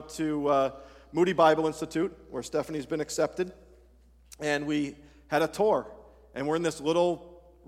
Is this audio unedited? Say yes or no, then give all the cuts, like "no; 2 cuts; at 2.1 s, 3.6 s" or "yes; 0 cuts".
yes; 0 cuts